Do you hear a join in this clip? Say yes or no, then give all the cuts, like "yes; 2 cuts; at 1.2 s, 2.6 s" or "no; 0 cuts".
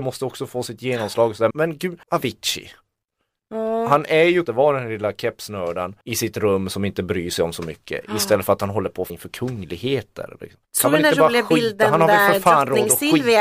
yes; 6 cuts; at 1.5 s, 2.0 s, 4.5 s, 6.0 s, 9.1 s, 10.6 s